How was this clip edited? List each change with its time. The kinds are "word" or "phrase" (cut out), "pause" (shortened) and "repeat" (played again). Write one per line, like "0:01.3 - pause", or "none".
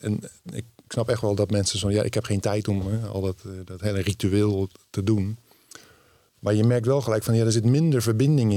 none